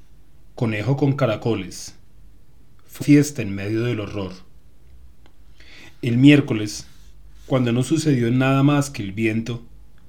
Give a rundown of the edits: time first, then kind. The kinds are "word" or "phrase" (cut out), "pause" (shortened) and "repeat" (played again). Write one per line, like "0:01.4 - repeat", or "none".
0:03.0 - word